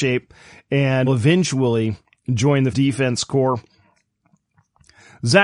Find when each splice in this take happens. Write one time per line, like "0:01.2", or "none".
0:01.1
0:02.7